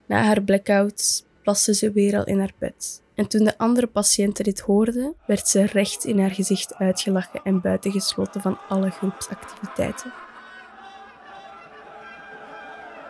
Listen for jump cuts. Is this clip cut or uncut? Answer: cut